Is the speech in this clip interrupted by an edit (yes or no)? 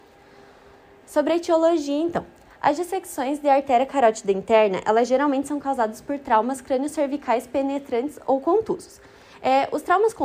no